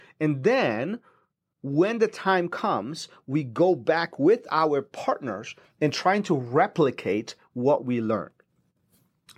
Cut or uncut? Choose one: uncut